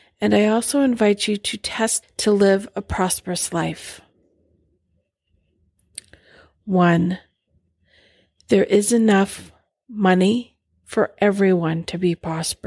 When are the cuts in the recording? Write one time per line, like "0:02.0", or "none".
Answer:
0:02.0